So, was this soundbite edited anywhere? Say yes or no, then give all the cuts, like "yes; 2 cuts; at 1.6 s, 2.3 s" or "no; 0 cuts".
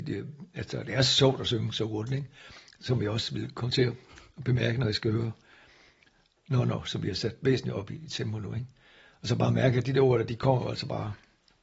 no; 0 cuts